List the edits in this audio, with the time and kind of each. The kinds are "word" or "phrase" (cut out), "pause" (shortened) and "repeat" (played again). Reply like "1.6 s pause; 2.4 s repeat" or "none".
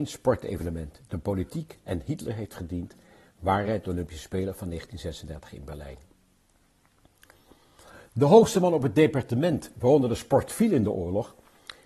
none